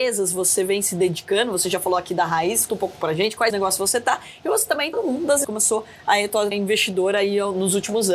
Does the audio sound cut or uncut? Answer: cut